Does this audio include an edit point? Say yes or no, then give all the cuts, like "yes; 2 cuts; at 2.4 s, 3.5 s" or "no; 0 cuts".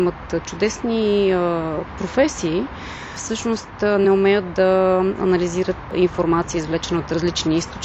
no; 0 cuts